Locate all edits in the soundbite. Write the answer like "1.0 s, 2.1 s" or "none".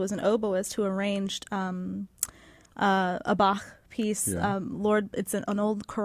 none

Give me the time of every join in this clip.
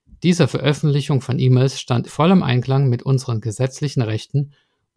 2.1 s

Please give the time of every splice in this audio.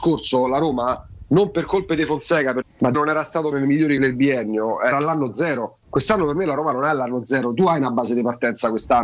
2.6 s, 2.9 s, 3.5 s, 4.0 s, 4.9 s, 5.8 s

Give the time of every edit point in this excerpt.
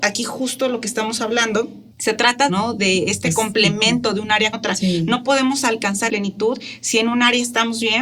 1.9 s, 2.5 s, 4.5 s, 6.1 s

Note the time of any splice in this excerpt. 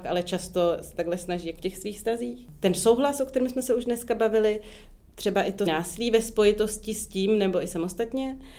1.6 s, 5.7 s

